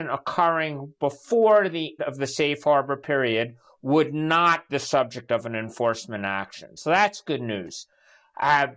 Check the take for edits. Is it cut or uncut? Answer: cut